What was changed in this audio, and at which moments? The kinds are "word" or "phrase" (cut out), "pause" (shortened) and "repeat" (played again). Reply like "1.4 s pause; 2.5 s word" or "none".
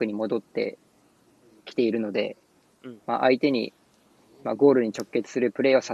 3.0 s pause